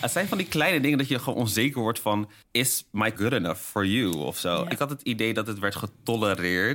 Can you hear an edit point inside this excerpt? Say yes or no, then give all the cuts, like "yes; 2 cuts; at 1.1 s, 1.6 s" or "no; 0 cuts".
yes; 2 cuts; at 2.4 s, 3.2 s